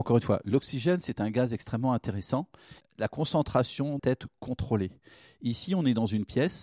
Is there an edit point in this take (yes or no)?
yes